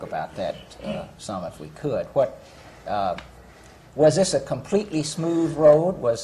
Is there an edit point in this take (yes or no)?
no